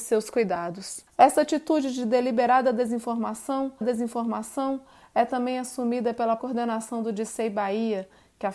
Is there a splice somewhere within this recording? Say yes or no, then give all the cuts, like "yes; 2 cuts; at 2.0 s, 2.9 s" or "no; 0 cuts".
yes; 3 cuts; at 1.1 s, 3.8 s, 6.4 s